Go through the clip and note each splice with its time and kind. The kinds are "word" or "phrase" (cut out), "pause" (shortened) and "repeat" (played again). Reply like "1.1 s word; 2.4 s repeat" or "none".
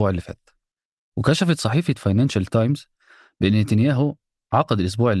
none

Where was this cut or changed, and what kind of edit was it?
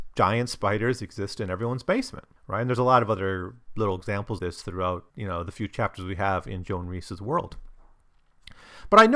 2.4 s pause; 4.4 s word; 5.1 s pause

